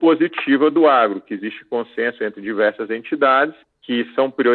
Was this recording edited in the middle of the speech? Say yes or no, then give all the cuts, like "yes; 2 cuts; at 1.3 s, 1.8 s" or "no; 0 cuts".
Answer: no; 0 cuts